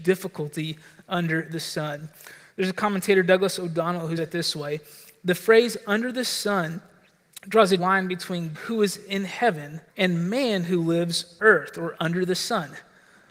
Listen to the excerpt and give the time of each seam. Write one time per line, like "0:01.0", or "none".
0:04.2
0:07.8
0:08.5
0:09.9
0:11.4